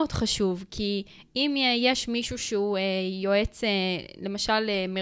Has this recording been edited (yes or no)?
no